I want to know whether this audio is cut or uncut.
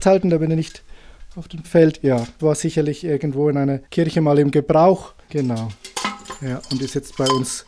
cut